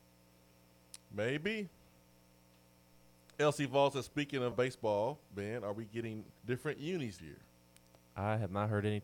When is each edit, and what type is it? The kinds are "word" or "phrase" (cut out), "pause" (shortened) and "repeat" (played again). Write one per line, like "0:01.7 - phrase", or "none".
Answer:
0:04.5 - word
0:06.4 - pause
0:07.2 - word